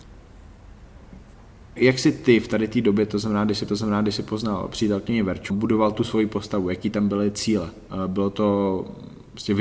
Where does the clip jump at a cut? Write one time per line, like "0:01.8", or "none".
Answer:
0:01.8
0:03.7
0:05.5